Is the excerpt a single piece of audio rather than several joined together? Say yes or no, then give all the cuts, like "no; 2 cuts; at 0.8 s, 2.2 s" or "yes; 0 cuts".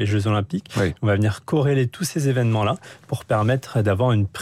yes; 0 cuts